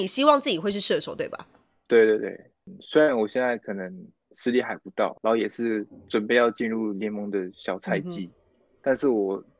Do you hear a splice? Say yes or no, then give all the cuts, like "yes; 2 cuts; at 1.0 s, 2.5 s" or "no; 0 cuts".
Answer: yes; 1 cut; at 5.2 s